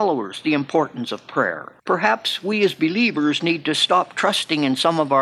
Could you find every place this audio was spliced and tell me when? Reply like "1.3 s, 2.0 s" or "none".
1.8 s